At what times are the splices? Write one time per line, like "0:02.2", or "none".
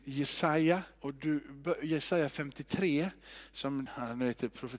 0:00.9
0:03.9